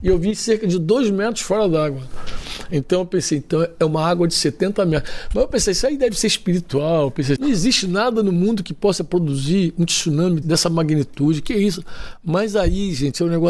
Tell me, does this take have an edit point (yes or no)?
yes